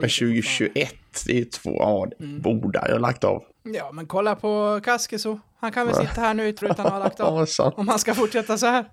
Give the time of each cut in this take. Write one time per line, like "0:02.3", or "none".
0:03.5
0:06.6